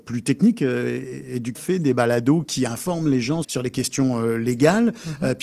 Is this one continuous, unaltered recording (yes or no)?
no